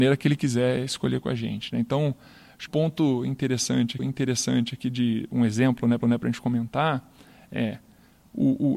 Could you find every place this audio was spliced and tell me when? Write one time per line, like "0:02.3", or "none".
0:02.7
0:04.0
0:06.0